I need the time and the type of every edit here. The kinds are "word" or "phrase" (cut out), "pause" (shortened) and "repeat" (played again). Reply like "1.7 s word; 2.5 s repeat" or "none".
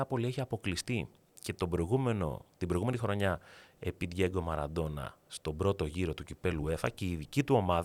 none

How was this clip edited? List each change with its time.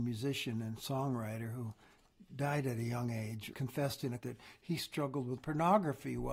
3.5 s word; 4.2 s word; 5.4 s word

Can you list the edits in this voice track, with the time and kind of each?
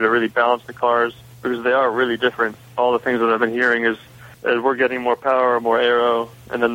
1.2 s pause; 4.3 s pause

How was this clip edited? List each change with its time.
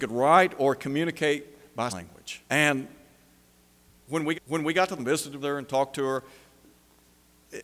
1.9 s word; 2.5 s pause; 4.3 s repeat; 5.0 s word; 5.4 s word

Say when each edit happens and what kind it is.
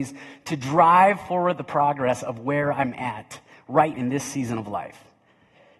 3.9 s word

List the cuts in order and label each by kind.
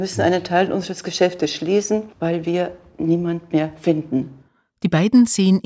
2.1 s pause

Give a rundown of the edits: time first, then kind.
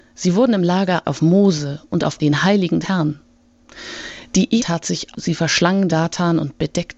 1.0 s word; 2.2 s word; 2.8 s word; 4.6 s word; 5.1 s word; 5.9 s word

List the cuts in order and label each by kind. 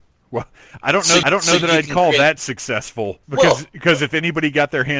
1.2 s repeat; 3.2 s pause

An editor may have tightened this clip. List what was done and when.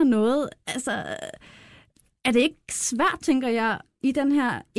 none

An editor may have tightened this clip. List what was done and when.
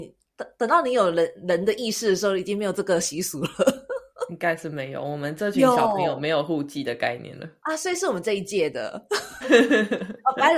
9.4 s word

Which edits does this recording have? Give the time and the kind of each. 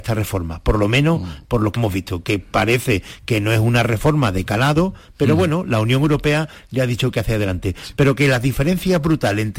1.8 s word

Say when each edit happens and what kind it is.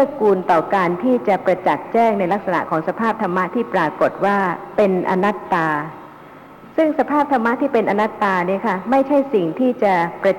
6.7 s pause

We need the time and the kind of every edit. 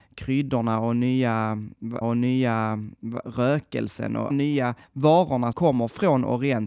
2.0 s repeat; 4.3 s phrase; 5.5 s word

